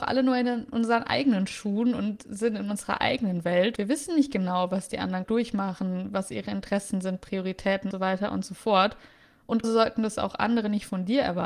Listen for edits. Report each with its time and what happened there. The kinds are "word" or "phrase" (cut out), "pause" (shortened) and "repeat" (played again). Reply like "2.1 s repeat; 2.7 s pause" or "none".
3.8 s word; 5.2 s word; 7.9 s word; 9.6 s word

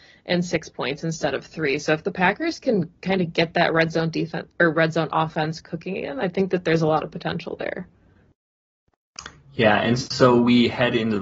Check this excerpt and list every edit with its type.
3.0 s pause

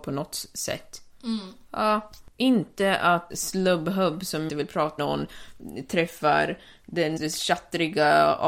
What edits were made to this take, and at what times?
2.3 s pause; 3.3 s word; 4.5 s word; 5.0 s word; 7.2 s word

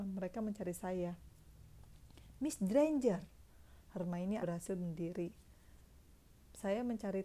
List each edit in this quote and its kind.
4.4 s word

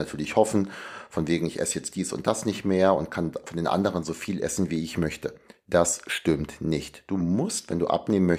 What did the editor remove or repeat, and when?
4.0 s word

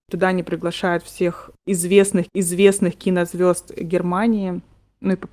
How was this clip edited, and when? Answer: 2.3 s repeat

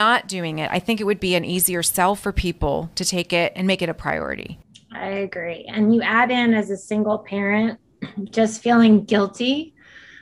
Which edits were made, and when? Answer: none

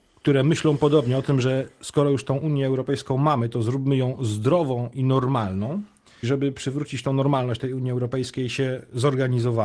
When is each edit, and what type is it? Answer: 6.2 s word

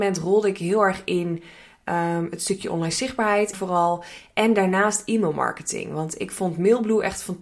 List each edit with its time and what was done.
3.5 s word

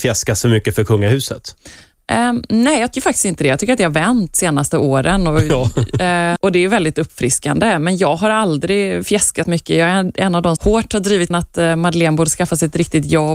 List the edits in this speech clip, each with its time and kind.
2.9 s word; 6.4 s word; 9.4 s word; 10.6 s word; 11.3 s word

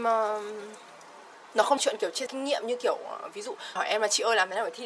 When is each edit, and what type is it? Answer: 1.8 s phrase; 2.3 s word; 3.8 s phrase

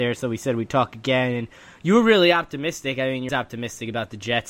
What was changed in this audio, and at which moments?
3.3 s word

